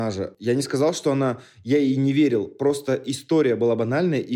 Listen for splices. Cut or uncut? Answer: uncut